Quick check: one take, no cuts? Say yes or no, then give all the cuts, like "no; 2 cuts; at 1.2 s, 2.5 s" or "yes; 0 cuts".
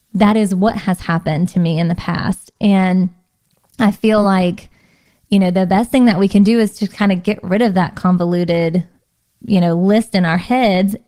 yes; 0 cuts